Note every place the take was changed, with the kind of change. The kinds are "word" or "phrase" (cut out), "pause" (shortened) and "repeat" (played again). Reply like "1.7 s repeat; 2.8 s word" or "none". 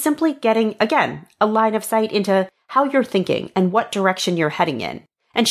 none